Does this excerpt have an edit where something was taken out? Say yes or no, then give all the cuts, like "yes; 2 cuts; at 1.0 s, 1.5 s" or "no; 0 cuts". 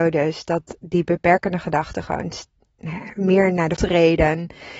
yes; 1 cut; at 3.8 s